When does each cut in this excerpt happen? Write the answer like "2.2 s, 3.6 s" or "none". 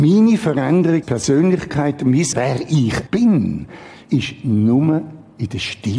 1.0 s, 2.3 s, 3.1 s, 4.0 s